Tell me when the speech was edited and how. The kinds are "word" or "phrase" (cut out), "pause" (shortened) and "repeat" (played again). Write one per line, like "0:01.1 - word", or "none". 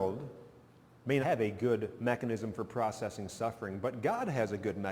0:01.2 - word